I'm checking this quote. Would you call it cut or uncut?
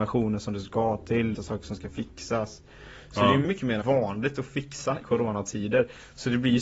cut